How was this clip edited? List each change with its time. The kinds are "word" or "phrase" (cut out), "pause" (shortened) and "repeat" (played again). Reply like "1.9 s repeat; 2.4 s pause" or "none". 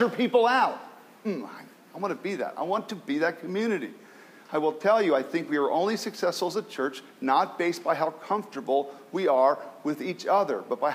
none